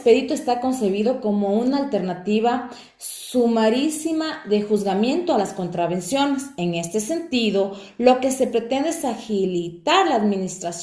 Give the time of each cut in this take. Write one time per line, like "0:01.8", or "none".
none

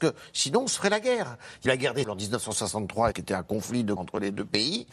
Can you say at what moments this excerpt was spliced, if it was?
0:01.7
0:02.0
0:03.1
0:04.0

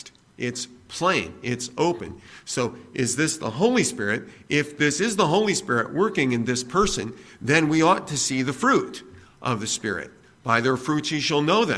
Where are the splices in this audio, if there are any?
none

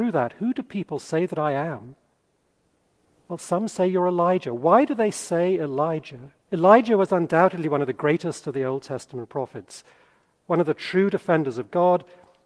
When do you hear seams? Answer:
0:06.4

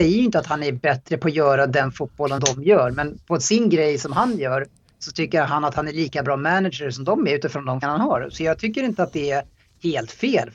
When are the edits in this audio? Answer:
0:02.4
0:07.8

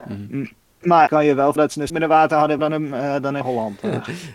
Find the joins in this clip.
0:01.1
0:01.6
0:01.9
0:02.6
0:03.4

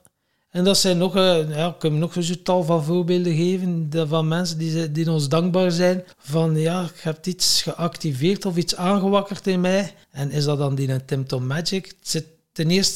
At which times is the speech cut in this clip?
0:06.1
0:10.0

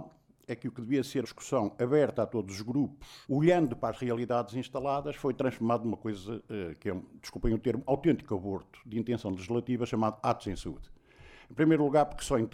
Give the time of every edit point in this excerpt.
0:01.2
0:03.2
0:07.9

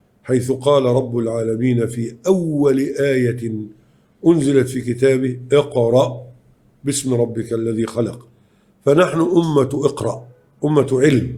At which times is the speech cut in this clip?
none

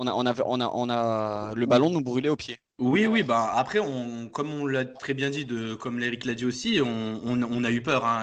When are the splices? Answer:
none

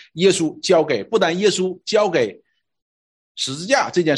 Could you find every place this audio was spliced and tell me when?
none

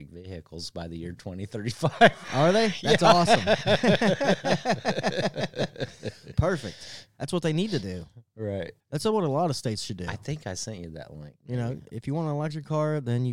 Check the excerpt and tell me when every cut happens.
0:08.8

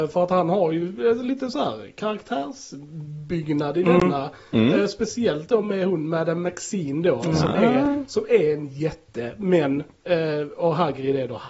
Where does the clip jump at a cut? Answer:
none

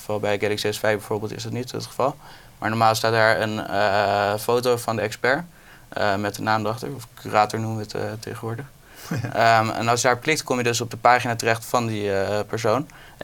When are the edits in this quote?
none

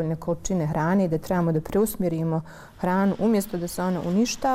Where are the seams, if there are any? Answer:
none

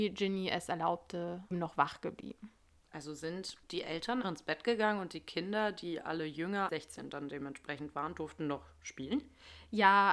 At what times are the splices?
0:01.5
0:03.6
0:04.2
0:06.7

